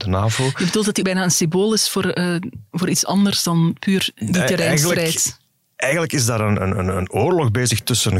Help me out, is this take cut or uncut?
cut